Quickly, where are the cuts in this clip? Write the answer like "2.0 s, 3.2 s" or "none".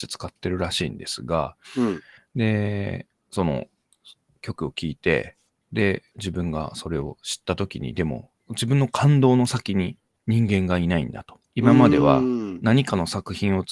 2.2 s, 8.4 s, 11.4 s